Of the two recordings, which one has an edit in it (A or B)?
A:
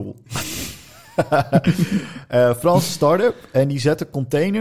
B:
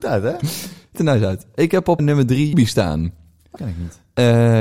B